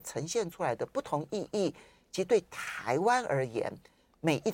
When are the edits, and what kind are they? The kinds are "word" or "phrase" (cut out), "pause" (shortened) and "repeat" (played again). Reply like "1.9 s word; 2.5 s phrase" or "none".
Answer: none